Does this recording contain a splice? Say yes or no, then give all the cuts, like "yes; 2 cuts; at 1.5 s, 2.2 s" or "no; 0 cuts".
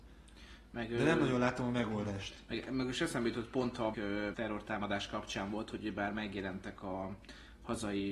yes; 2 cuts; at 3.9 s, 4.3 s